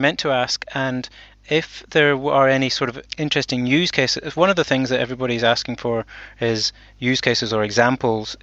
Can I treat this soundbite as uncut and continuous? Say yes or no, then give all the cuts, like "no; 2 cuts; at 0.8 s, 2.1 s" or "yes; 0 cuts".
yes; 0 cuts